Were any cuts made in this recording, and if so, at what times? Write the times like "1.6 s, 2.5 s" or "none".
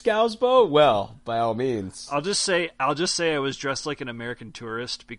none